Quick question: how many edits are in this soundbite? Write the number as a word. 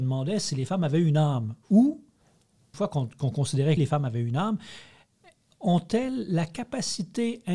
two